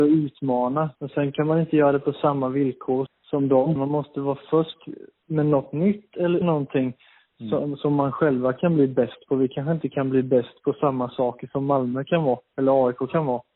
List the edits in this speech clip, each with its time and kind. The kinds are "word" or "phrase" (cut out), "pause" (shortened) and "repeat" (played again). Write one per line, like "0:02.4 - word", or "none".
0:00.9 - pause
0:03.1 - word
0:03.8 - phrase
0:06.4 - word